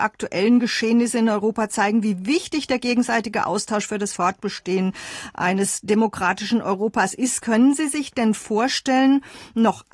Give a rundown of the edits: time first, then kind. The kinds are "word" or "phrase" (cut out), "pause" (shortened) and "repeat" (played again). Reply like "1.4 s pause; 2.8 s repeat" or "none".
none